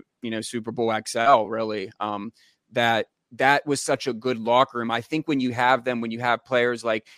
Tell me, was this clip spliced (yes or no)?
no